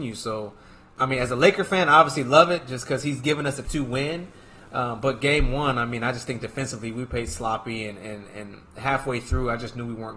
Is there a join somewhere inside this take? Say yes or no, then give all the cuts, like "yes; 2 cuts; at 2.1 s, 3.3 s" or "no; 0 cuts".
yes; 1 cut; at 3.6 s